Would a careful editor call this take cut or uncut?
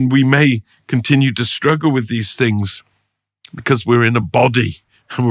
uncut